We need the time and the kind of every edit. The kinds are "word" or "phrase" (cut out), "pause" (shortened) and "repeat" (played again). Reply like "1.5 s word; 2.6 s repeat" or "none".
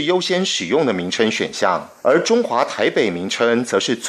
2.0 s pause